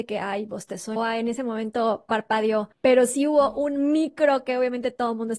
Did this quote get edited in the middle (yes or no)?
yes